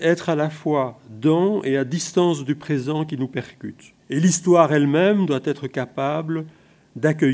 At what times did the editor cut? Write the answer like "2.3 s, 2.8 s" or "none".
4.0 s